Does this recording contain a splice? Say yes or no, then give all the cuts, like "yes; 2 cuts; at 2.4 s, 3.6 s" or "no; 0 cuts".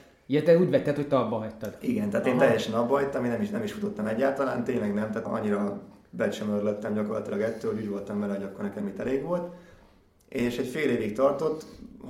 yes; 1 cut; at 5.2 s